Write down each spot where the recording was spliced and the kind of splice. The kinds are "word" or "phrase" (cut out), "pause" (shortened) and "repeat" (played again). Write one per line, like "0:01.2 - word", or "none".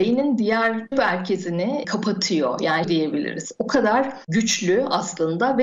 0:00.9 - word
0:02.8 - phrase